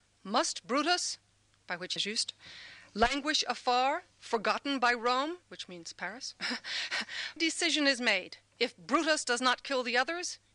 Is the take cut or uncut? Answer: cut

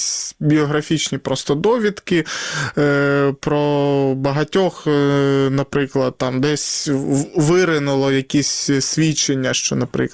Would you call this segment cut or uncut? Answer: uncut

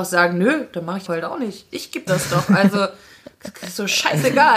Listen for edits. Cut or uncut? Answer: cut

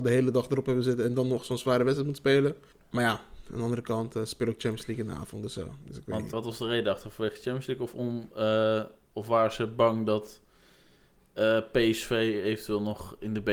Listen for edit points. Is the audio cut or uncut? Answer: cut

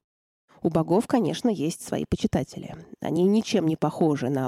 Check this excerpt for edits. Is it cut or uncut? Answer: uncut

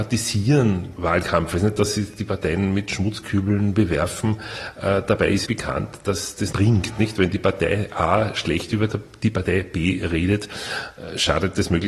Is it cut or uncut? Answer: cut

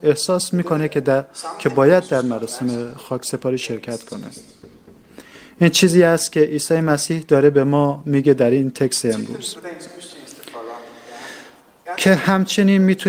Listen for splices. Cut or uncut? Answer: uncut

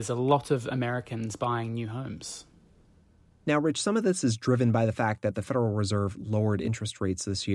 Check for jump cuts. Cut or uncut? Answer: uncut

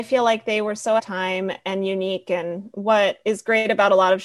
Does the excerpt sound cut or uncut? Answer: cut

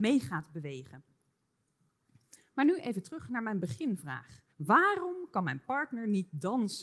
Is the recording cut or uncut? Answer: cut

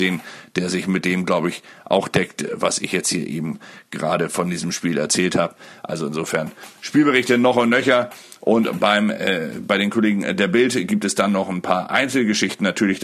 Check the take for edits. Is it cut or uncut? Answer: uncut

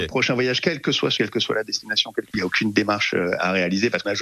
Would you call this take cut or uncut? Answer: cut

